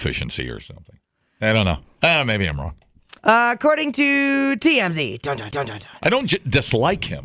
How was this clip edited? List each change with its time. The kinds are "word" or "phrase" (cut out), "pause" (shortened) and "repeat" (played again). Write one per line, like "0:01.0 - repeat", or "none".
0:03.2 - pause
0:05.5 - repeat